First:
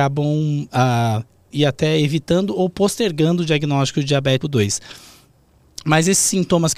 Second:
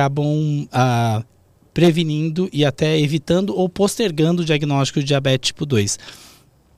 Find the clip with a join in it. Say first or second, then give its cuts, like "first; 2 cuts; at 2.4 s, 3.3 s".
first; 2 cuts; at 1.5 s, 4.4 s